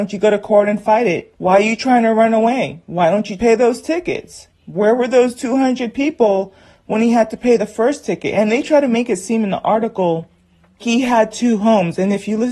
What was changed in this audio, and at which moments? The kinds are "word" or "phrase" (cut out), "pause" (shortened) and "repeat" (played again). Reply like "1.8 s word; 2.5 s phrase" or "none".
1.3 s pause; 3.4 s word; 4.5 s pause; 10.8 s word